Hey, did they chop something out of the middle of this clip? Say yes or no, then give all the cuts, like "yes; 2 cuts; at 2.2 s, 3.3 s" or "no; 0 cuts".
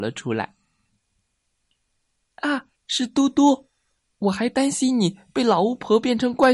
yes; 1 cut; at 2.8 s